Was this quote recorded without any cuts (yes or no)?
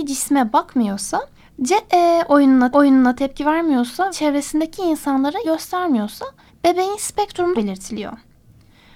no